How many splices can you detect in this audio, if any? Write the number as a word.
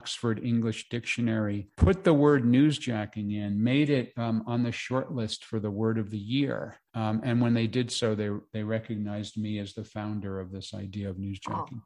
two